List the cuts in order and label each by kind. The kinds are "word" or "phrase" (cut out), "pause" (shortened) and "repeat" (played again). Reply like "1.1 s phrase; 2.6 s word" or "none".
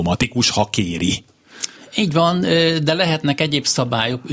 1.8 s pause